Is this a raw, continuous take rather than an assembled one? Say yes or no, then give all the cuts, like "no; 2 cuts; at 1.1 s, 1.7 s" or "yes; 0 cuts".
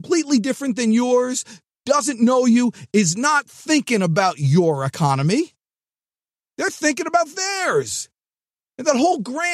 yes; 0 cuts